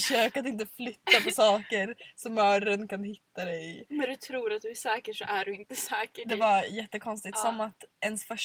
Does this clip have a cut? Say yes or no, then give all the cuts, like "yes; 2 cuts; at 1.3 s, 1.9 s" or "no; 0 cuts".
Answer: no; 0 cuts